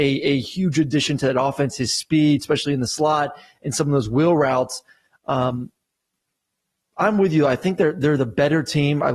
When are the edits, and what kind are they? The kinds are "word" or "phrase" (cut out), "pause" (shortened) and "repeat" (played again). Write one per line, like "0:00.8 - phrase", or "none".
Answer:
none